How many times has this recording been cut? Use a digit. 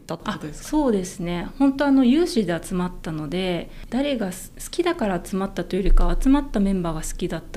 1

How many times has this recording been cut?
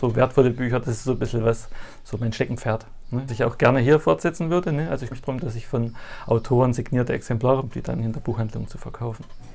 3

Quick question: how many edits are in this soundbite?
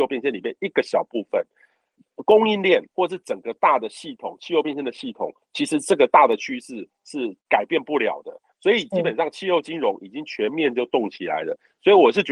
2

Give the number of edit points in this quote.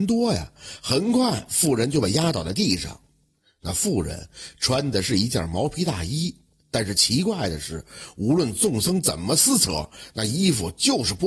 0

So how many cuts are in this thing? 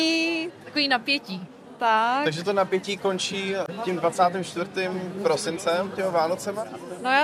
0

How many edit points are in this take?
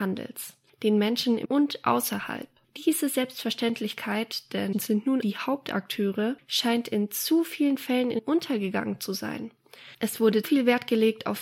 5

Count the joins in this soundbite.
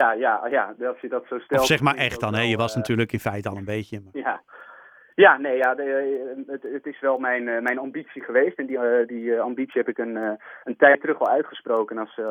0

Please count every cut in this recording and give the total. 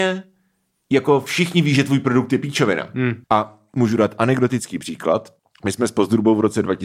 2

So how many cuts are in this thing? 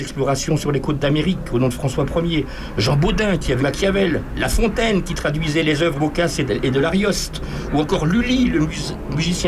2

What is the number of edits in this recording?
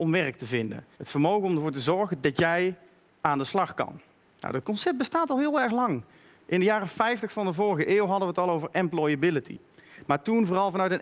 1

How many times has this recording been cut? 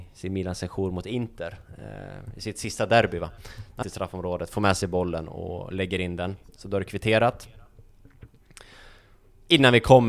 1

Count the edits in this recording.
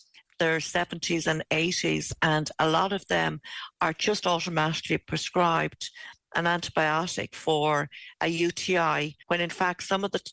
1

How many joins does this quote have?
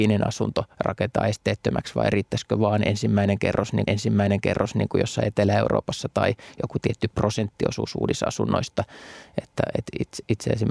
1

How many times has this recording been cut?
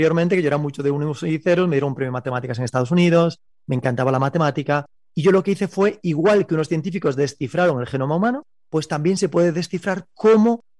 0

